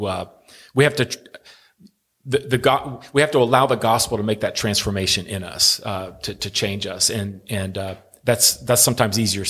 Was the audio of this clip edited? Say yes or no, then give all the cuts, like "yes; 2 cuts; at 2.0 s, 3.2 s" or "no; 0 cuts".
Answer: no; 0 cuts